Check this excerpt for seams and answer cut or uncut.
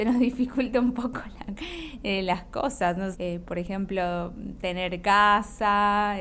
cut